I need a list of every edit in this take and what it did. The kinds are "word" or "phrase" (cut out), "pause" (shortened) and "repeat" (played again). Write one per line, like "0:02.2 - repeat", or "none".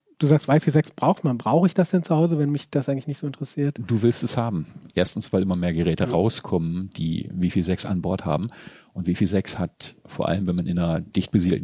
none